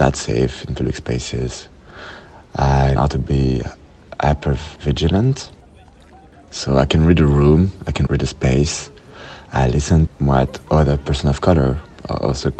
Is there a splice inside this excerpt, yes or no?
yes